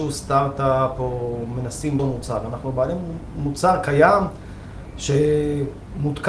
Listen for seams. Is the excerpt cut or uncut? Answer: cut